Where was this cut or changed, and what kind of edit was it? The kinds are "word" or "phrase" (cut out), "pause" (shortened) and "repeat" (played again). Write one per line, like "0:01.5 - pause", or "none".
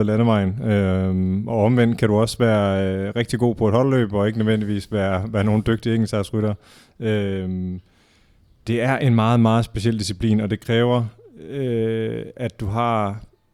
none